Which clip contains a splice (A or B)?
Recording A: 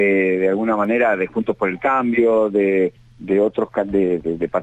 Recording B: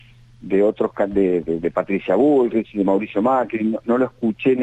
A